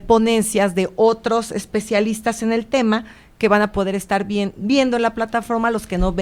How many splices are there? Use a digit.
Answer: 0